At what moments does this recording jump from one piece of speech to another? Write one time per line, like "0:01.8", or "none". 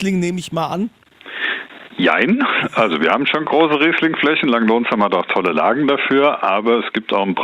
none